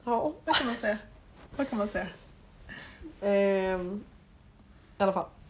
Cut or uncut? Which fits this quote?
uncut